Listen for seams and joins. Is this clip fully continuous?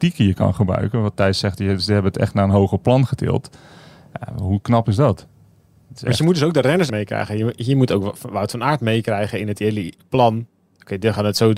no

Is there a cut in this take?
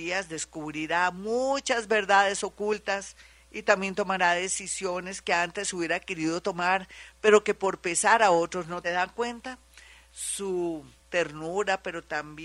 yes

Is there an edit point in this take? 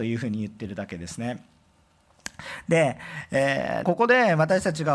yes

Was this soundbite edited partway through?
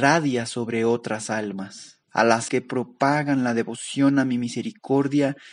yes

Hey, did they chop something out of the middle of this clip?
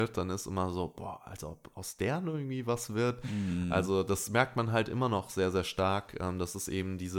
no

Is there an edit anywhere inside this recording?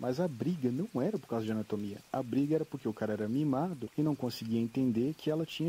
no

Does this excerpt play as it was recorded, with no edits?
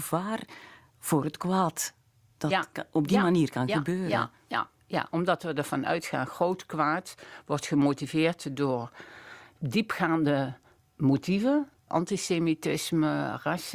yes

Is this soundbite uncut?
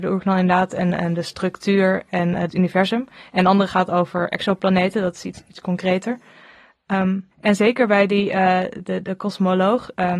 no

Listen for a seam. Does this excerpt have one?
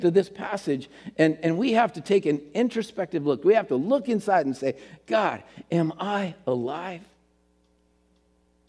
no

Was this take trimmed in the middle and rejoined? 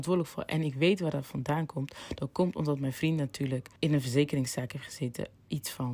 yes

